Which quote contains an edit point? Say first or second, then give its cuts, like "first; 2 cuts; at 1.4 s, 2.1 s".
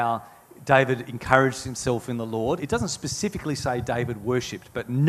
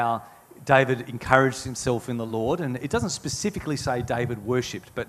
first; 1 cut; at 2.6 s